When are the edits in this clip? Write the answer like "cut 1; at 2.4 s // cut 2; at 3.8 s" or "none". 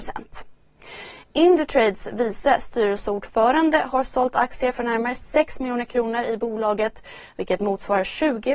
none